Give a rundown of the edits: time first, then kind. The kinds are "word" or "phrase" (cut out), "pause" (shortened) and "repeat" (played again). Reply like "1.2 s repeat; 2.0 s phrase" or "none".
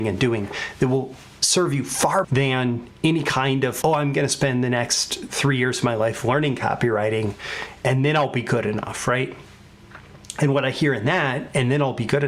2.2 s word; 3.8 s word